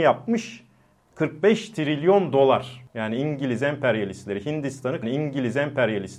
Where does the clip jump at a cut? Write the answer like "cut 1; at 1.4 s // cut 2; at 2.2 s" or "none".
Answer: cut 1; at 5.0 s